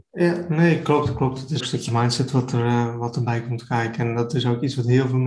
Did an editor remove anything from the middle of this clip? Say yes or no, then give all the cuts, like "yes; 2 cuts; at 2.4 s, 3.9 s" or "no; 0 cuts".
yes; 1 cut; at 1.6 s